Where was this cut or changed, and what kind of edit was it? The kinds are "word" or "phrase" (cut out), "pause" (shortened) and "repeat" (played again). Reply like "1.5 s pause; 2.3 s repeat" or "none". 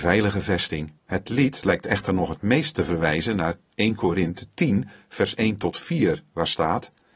1.0 s pause